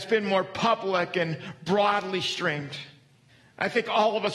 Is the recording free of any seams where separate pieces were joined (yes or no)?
no